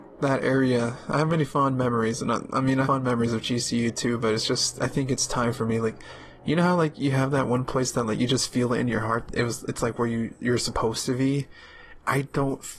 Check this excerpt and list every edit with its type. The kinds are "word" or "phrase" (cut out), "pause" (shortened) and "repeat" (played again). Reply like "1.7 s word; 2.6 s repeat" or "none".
2.8 s word; 9.3 s word